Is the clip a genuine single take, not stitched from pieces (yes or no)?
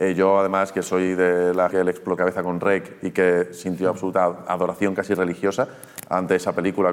no